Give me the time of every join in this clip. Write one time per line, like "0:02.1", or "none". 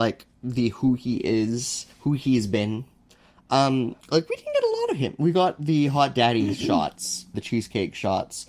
0:01.9
0:04.0
0:07.3